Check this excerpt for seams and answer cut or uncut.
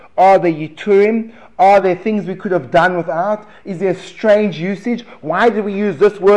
uncut